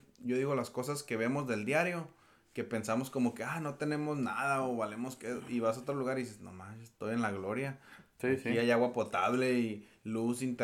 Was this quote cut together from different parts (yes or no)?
no